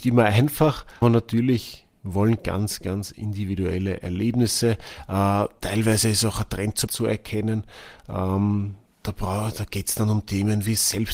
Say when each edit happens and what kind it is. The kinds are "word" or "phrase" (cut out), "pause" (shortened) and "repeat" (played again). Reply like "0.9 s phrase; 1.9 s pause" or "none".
1.0 s word; 2.4 s word; 6.9 s word; 8.9 s pause